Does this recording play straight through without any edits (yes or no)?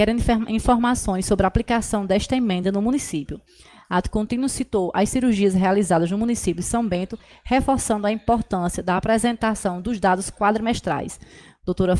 yes